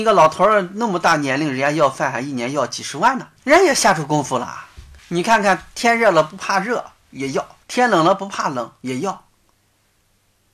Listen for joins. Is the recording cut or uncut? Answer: cut